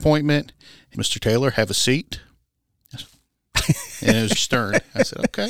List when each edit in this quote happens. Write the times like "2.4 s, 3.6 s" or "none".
0.9 s, 4.3 s